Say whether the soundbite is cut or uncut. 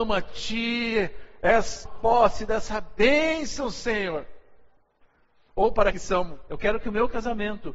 cut